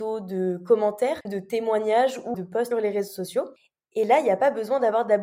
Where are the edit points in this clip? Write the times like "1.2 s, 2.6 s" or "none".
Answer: 1.2 s, 2.3 s, 2.7 s